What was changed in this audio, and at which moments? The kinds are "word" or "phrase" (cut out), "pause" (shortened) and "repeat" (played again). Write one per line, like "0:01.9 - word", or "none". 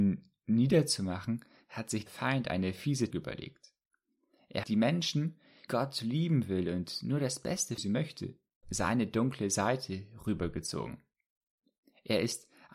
0:02.1 - word
0:03.1 - word
0:04.6 - word
0:05.7 - word
0:07.8 - word
0:08.6 - word